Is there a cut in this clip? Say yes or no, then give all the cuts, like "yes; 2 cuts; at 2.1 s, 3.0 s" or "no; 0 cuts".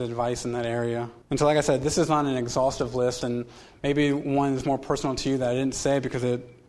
yes; 1 cut; at 1.2 s